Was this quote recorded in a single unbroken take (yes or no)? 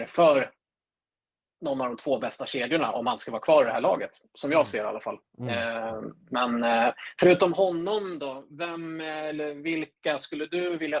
yes